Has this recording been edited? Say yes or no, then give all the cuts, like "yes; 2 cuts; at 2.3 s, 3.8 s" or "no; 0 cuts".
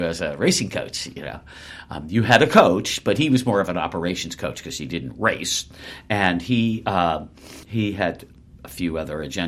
yes; 1 cut; at 7.6 s